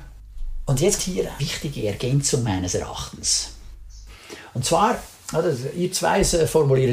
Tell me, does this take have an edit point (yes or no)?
yes